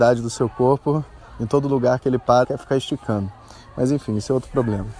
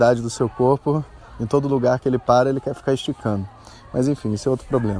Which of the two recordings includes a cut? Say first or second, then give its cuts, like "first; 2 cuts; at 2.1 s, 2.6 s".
first; 1 cut; at 2.4 s